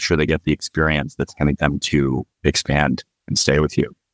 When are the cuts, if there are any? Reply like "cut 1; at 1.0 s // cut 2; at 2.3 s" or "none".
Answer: cut 1; at 1.5 s // cut 2; at 2.3 s